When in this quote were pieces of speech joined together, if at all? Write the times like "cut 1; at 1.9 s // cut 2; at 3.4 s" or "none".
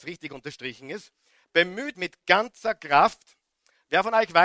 cut 1; at 1.9 s